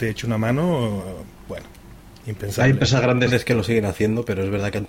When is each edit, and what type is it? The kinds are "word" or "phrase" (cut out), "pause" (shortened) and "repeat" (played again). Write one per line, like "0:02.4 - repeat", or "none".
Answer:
none